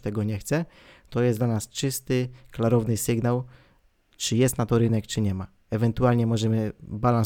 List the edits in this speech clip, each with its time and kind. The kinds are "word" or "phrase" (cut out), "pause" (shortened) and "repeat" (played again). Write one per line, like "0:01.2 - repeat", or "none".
none